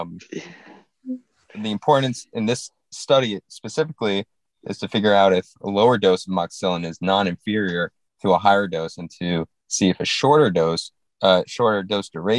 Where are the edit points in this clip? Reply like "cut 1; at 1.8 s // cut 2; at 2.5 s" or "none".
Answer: none